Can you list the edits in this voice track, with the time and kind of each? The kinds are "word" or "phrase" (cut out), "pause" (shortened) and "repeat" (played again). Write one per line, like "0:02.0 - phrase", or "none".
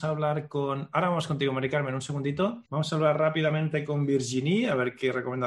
0:02.7 - pause